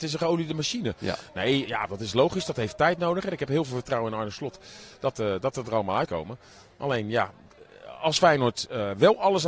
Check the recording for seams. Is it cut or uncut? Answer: cut